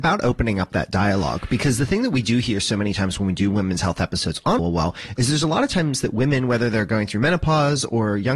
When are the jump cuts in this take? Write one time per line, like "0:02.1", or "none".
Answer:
0:04.6